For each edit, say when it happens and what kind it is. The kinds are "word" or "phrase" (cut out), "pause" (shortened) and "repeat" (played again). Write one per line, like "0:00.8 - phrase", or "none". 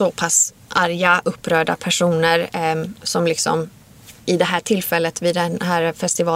none